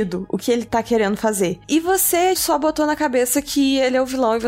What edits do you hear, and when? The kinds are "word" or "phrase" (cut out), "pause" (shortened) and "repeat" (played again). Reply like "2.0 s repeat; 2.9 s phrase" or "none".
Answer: 2.4 s word